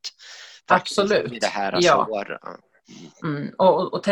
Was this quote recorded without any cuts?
yes; 0 cuts

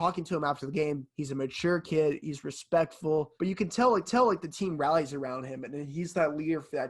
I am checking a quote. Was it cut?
yes; 2 cuts; at 3.4 s, 4.1 s

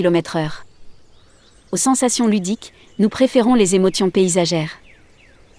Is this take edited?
no; 0 cuts

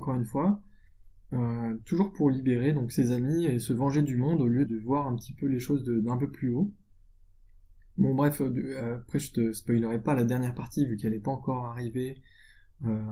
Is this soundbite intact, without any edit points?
no; 1 cut; at 4.7 s

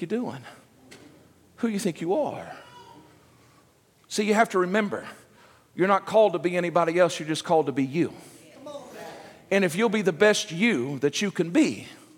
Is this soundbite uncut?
yes; 0 cuts

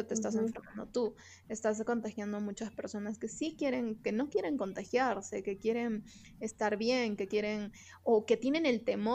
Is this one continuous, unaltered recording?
yes; 0 cuts

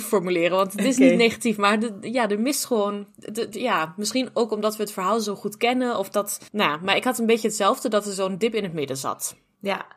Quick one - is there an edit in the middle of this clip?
yes; 1 cut; at 6.5 s

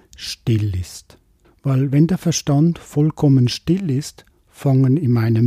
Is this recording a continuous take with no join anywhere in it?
yes; 0 cuts

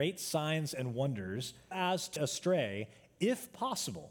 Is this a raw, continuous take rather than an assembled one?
no; 2 cuts; at 1.7 s, 2.2 s

